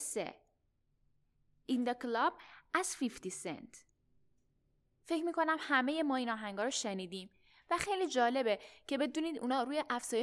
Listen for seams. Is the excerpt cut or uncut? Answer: uncut